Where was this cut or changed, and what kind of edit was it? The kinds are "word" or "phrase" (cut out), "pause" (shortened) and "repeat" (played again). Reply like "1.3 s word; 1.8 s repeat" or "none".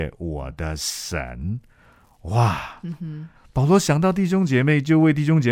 none